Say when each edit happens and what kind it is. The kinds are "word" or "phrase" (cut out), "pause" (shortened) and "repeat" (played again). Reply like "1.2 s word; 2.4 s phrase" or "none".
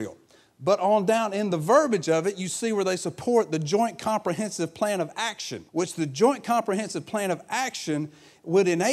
5.7 s pause